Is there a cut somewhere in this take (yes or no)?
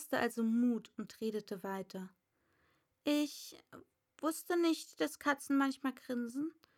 no